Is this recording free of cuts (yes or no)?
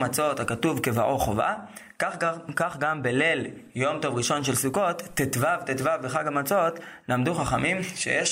yes